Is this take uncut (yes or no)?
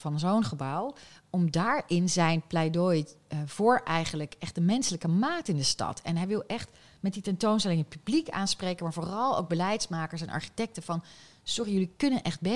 yes